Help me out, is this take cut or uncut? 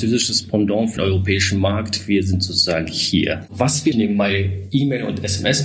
cut